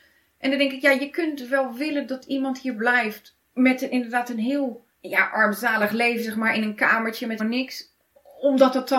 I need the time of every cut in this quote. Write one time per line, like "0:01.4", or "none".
0:03.4
0:04.9
0:07.4